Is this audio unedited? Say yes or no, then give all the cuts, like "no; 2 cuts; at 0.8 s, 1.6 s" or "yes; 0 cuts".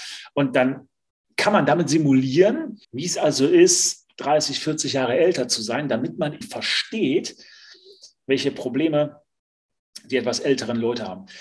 no; 2 cuts; at 2.8 s, 6.4 s